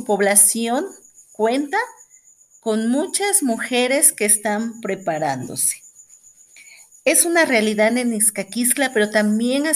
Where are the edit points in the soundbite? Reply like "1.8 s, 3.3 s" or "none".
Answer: none